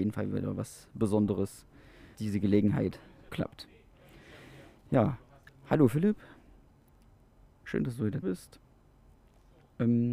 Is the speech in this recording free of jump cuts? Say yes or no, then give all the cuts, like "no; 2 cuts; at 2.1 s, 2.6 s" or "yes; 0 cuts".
no; 3 cuts; at 2.1 s, 3.3 s, 8.2 s